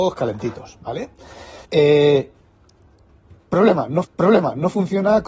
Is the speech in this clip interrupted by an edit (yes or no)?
yes